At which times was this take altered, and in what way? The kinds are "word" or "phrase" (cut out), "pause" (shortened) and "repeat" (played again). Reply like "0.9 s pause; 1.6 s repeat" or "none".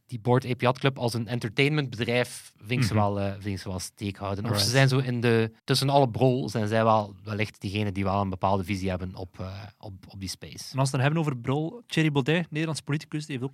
5.6 s pause

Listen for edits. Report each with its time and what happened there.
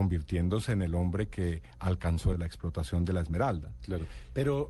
2.3 s word

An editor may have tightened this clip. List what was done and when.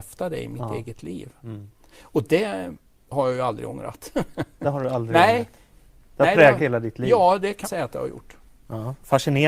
6.6 s word; 7.6 s word

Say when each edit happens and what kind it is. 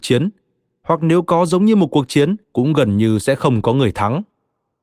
2.4 s pause

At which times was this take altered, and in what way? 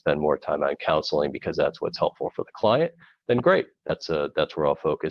none

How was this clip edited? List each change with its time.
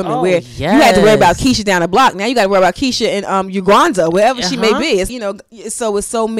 5.1 s word

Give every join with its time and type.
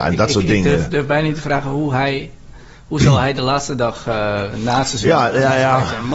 none

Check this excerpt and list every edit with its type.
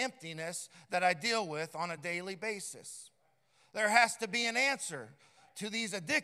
none

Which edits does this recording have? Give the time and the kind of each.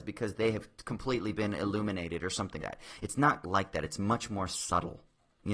2.6 s word; 3.4 s word

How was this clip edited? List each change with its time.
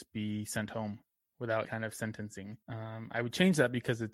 1.6 s word; 2.6 s pause

